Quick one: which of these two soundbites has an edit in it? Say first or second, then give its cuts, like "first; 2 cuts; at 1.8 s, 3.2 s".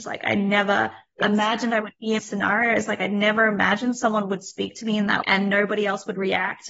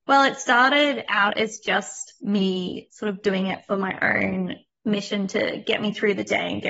first; 2 cuts; at 2.2 s, 5.2 s